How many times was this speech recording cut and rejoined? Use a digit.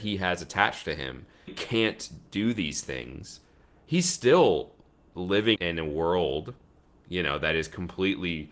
2